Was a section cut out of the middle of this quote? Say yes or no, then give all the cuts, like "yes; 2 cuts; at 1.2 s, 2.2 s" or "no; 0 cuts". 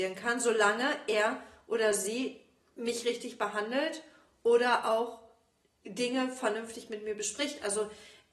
no; 0 cuts